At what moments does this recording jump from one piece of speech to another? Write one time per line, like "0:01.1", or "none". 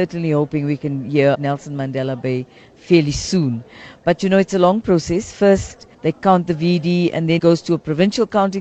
0:01.3
0:05.9
0:07.4